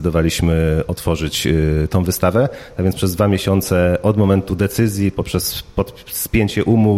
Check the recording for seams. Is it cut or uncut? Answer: uncut